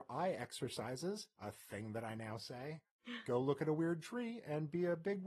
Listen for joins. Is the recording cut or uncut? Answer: uncut